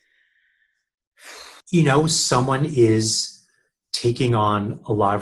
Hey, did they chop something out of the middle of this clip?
yes; 1 cut; at 1.6 s

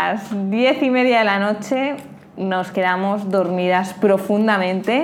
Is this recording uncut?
yes; 0 cuts

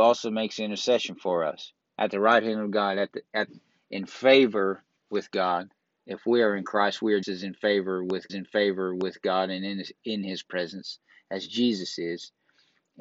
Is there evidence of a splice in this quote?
yes; 3 cuts; at 5.0 s, 7.2 s, 8.3 s

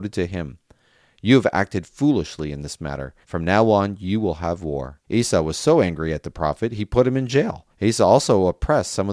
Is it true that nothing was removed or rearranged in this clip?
no; 3 cuts; at 3.2 s, 5.0 s, 7.7 s

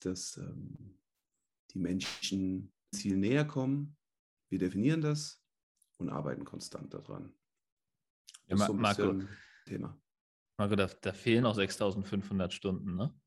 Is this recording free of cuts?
no; 4 cuts; at 2.9 s, 9.7 s, 10.9 s, 11.4 s

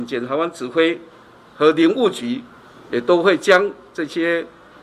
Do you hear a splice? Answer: no; 0 cuts

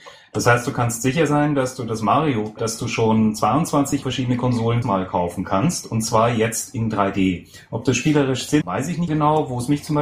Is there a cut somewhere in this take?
yes; 5 cuts; at 2.6 s, 4.0 s, 4.8 s, 8.6 s, 9.1 s

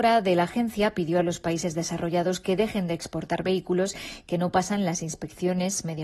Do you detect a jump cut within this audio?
no; 0 cuts

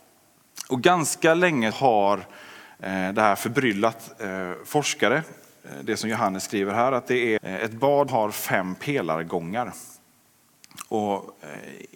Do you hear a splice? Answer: yes; 3 cuts; at 1.7 s, 7.4 s, 8.1 s

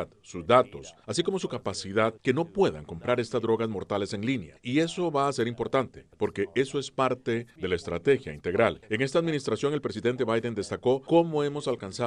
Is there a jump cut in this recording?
no; 0 cuts

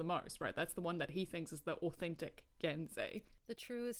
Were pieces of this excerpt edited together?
no; 0 cuts

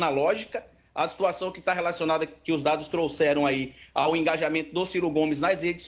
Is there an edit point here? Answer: no; 0 cuts

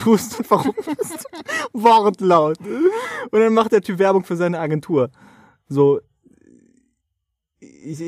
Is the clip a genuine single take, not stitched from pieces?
yes; 0 cuts

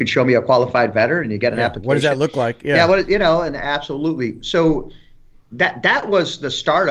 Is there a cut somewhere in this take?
no; 0 cuts

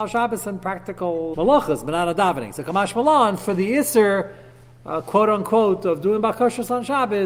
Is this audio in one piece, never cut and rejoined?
no; 1 cut; at 1.3 s

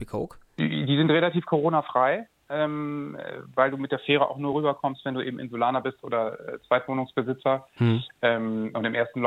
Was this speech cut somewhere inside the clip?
no; 0 cuts

